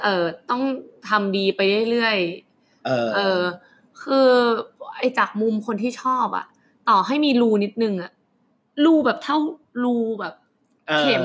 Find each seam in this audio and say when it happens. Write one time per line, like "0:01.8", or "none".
none